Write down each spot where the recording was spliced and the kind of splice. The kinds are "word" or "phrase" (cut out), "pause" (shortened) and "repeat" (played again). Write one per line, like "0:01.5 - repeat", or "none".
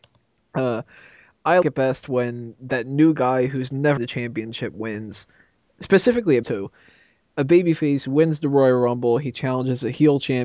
0:01.6 - word
0:04.0 - word
0:06.4 - word